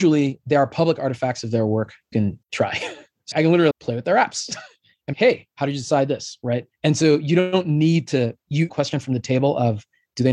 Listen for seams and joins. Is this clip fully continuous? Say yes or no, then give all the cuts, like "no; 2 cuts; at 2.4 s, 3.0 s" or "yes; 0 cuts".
no; 7 cuts; at 2.1 s, 2.4 s, 3.3 s, 3.7 s, 5.1 s, 6.7 s, 8.7 s